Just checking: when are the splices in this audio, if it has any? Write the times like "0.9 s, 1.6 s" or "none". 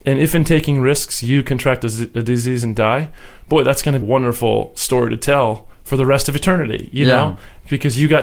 4.0 s, 5.7 s